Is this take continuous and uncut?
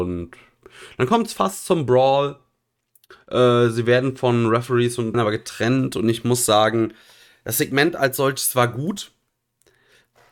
no; 1 cut; at 5.1 s

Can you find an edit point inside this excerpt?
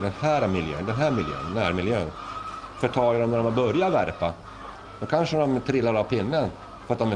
no; 0 cuts

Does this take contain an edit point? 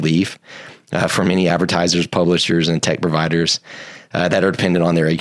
no; 0 cuts

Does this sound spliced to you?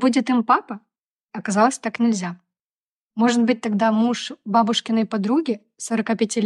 no; 0 cuts

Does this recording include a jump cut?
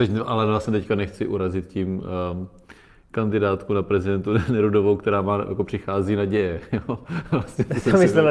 no; 0 cuts

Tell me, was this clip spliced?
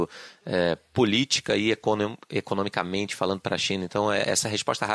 no; 0 cuts

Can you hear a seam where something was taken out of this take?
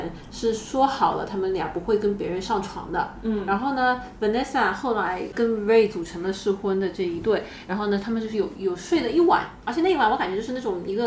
no; 0 cuts

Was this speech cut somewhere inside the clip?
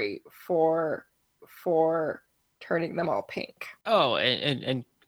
yes; 1 cut; at 1.4 s

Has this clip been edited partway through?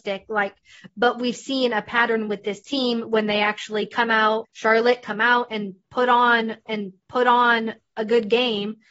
yes; 2 cuts; at 4.4 s, 6.7 s

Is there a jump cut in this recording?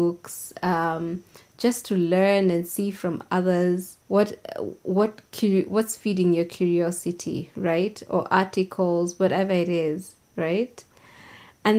yes; 1 cut; at 4.0 s

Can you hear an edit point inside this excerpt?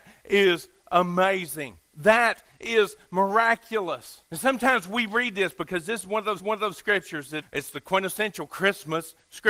yes; 4 cuts; at 1.9 s, 4.3 s, 6.4 s, 7.4 s

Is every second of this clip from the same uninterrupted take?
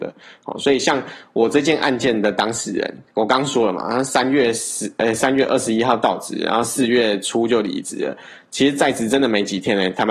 yes; 0 cuts

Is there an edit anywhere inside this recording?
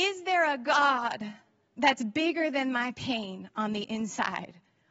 no; 0 cuts

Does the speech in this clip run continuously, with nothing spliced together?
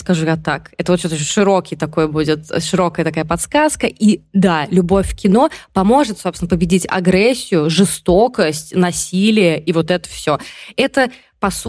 yes; 0 cuts

